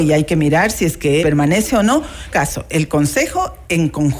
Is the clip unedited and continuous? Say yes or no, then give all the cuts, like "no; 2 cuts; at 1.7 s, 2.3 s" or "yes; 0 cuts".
no; 2 cuts; at 1.2 s, 2.3 s